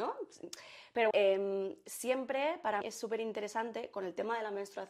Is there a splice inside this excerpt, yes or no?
yes